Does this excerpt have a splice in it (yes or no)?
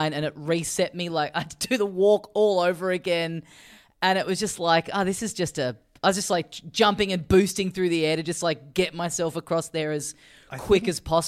no